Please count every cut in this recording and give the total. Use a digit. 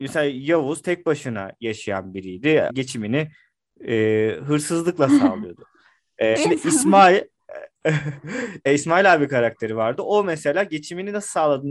3